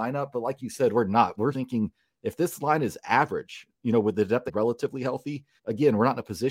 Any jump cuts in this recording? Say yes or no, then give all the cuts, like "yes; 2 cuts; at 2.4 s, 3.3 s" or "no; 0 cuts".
yes; 4 cuts; at 1.5 s, 3.7 s, 4.5 s, 5.6 s